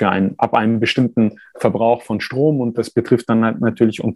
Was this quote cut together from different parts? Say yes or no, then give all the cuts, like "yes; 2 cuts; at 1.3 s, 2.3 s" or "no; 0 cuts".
no; 0 cuts